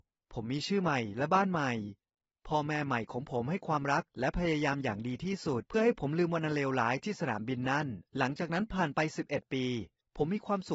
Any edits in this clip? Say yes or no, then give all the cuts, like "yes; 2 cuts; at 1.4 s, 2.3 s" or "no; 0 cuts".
yes; 1 cut; at 8.1 s